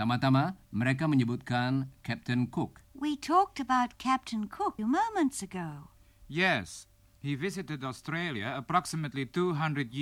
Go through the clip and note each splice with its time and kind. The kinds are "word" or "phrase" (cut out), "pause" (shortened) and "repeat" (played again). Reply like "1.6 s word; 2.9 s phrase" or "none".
2.8 s word; 4.8 s phrase